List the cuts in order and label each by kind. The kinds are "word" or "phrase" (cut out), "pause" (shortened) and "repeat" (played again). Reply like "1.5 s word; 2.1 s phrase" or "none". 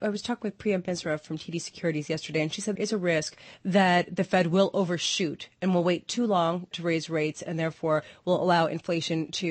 2.8 s phrase; 3.5 s pause; 6.7 s word